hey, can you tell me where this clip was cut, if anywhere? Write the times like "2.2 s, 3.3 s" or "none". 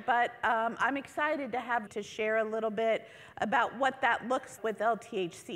1.9 s, 4.6 s